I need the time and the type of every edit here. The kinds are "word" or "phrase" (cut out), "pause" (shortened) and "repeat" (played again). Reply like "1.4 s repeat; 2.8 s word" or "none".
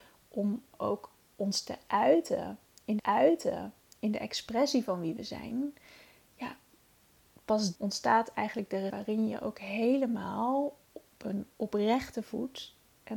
1.2 s pause; 3.0 s repeat; 7.8 s word; 8.9 s word; 11.5 s pause